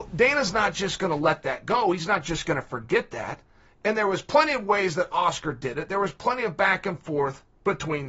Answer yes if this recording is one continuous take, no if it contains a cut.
yes